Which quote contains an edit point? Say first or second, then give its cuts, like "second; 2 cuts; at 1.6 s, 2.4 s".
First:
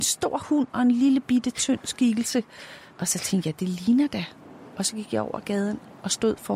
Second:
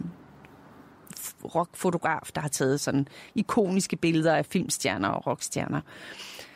first; 1 cut; at 2.9 s